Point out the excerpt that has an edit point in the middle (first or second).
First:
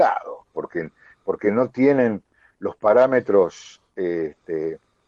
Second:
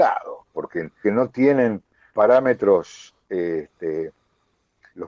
second